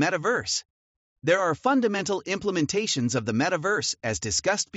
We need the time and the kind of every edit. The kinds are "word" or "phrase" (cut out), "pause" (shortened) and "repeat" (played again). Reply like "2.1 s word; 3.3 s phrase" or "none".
none